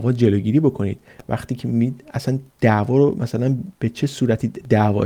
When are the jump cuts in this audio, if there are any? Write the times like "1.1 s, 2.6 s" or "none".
2.5 s, 3.7 s

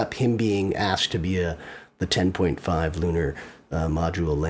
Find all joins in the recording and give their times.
none

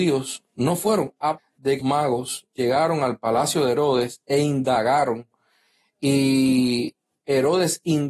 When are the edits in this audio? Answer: 1.4 s, 1.8 s

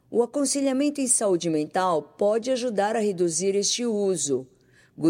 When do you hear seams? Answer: none

